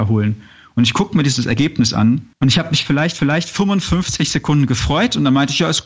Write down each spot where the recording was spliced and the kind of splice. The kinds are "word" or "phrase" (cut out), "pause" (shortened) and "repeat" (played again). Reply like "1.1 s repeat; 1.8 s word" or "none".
2.3 s pause; 3.2 s repeat